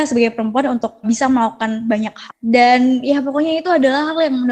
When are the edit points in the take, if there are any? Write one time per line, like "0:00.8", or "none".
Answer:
0:01.0
0:02.3